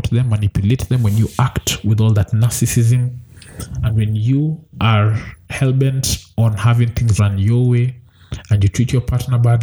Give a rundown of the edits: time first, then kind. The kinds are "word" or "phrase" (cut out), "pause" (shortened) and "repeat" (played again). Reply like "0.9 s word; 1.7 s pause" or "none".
7.2 s word